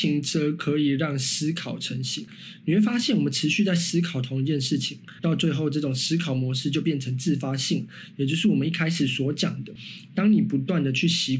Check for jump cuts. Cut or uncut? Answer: uncut